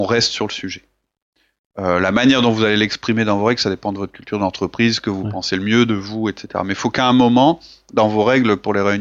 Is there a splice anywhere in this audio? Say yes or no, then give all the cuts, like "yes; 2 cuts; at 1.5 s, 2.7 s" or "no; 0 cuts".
no; 0 cuts